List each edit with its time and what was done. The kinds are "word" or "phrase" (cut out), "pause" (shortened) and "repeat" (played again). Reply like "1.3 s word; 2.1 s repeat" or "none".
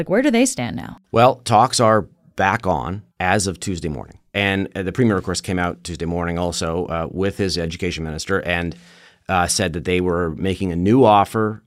3.1 s pause